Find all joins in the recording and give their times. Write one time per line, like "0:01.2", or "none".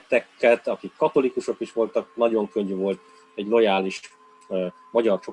none